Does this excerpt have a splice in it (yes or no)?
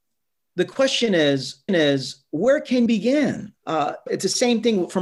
yes